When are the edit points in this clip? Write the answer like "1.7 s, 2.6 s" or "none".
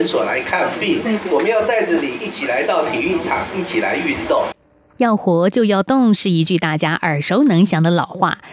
none